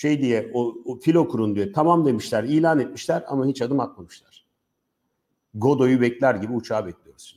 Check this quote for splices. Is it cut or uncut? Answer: uncut